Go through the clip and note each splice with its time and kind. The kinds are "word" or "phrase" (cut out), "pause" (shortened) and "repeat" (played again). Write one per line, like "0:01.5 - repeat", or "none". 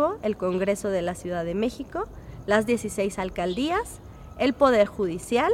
none